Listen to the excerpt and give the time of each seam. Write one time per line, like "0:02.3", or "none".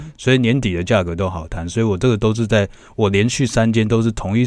none